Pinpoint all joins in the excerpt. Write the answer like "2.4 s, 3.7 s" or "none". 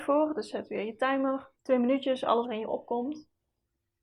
1.5 s, 2.4 s